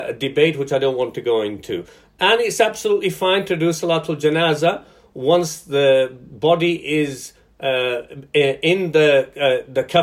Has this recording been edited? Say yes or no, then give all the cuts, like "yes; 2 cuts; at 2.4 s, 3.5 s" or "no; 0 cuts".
no; 0 cuts